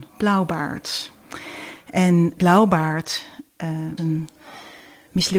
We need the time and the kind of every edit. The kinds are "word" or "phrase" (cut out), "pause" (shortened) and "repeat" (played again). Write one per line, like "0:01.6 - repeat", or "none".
0:02.4 - word
0:04.0 - word

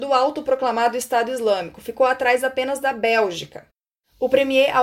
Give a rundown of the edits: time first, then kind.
none

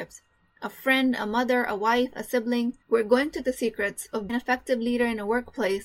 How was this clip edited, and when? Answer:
0:02.8 - pause
0:03.4 - word
0:04.3 - word

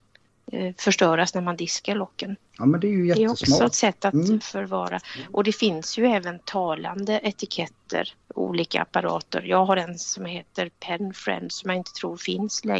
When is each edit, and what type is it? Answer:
0:02.5 - pause
0:08.2 - pause

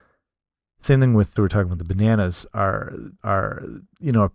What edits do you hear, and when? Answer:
0:01.4 - phrase
0:03.2 - repeat

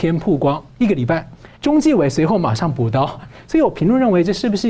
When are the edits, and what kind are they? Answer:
0:01.6 - pause

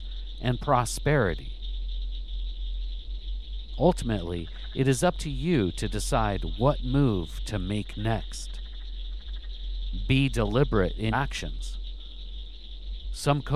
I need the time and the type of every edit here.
0:11.1 - word

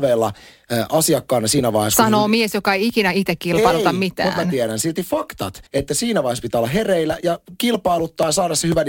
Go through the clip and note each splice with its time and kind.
0:05.7 - pause

